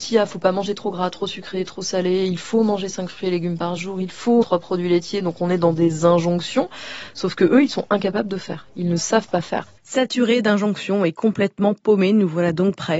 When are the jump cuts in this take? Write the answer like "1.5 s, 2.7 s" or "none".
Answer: 4.4 s, 9.8 s